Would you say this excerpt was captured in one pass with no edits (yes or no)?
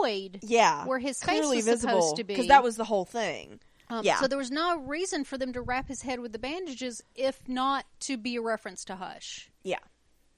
yes